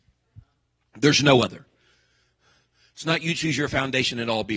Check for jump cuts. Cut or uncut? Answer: uncut